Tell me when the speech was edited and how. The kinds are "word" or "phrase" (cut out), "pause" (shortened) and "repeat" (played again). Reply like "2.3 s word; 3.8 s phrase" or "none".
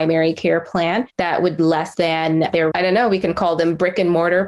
1.1 s pause; 1.6 s word; 1.9 s word; 2.7 s word

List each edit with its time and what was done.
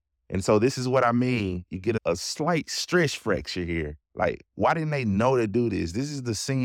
4.0 s pause

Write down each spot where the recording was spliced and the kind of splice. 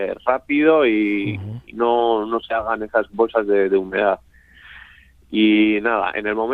none

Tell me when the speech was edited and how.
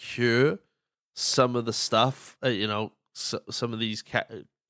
none

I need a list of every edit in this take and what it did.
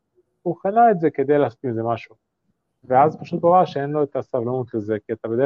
none

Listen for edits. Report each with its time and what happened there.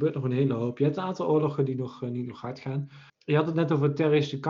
3.1 s pause

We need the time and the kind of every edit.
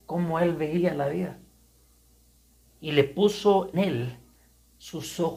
3.7 s word

